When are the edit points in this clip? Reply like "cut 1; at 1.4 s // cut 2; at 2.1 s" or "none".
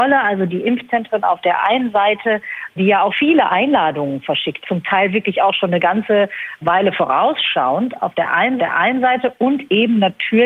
cut 1; at 3.1 s // cut 2; at 4.6 s // cut 3; at 8.6 s